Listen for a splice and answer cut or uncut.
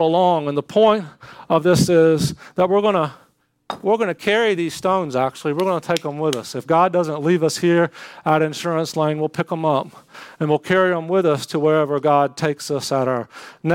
uncut